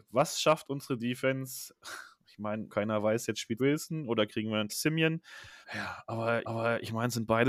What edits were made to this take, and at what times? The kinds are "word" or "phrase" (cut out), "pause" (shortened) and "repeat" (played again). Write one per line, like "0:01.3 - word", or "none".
0:02.7 - word
0:03.6 - word
0:04.7 - word
0:05.6 - pause
0:06.4 - repeat